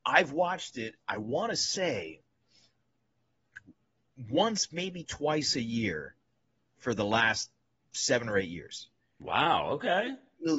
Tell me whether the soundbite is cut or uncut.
uncut